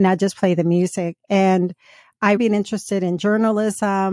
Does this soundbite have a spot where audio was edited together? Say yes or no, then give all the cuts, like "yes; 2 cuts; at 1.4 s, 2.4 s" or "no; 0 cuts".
yes; 1 cut; at 2.4 s